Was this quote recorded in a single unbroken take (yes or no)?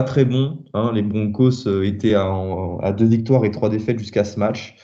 yes